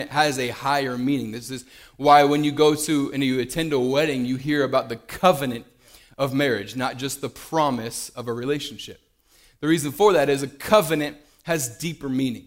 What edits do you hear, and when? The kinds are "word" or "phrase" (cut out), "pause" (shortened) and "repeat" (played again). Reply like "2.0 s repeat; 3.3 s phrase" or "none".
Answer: none